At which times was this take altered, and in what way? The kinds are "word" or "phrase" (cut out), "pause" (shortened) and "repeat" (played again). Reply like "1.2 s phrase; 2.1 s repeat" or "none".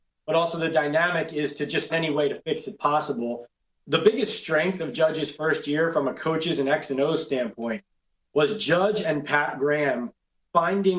1.9 s word